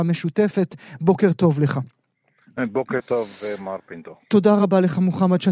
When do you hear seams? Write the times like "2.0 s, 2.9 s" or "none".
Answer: none